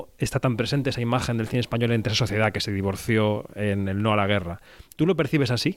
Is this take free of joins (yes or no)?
yes